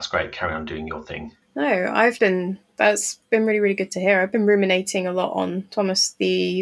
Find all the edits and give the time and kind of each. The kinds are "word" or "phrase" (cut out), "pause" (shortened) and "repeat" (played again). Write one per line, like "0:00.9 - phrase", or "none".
0:01.4 - pause
0:02.2 - word